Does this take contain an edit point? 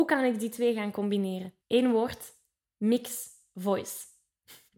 yes; 1 cut; at 1.6 s

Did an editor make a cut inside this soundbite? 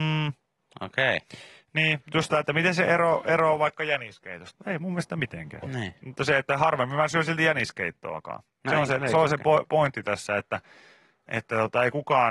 no; 0 cuts

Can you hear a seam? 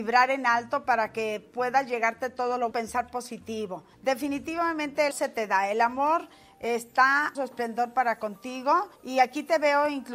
yes; 5 cuts; at 2.7 s, 3.9 s, 5.1 s, 7.3 s, 9.0 s

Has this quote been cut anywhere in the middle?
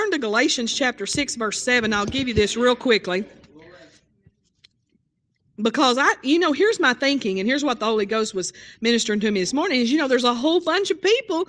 no; 0 cuts

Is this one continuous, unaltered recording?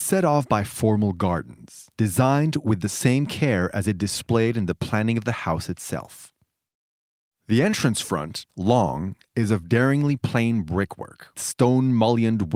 no; 3 cuts; at 1.9 s, 8.5 s, 11.3 s

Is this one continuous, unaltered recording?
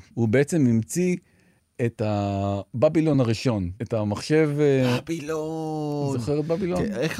yes; 0 cuts

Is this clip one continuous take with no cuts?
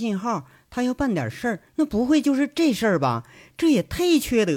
no; 1 cut; at 1.7 s

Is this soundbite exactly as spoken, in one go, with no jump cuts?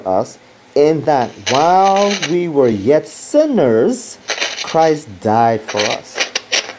yes; 0 cuts

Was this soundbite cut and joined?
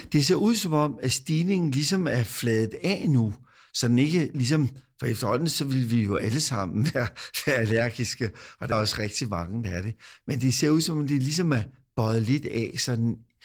yes; 1 cut; at 8.7 s

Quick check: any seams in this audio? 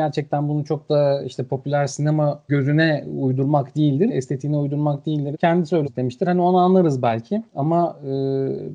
yes; 5 cuts; at 2.5 s, 4.1 s, 5.3 s, 5.8 s, 7.5 s

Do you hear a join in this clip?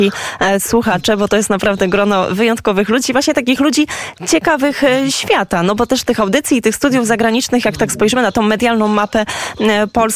no; 0 cuts

